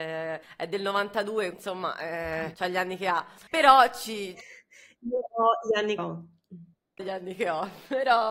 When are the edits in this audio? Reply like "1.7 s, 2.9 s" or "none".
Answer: 1.5 s, 6.0 s, 7.0 s